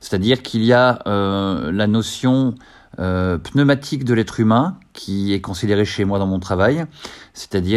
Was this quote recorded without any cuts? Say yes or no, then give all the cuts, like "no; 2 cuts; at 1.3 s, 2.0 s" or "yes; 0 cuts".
yes; 0 cuts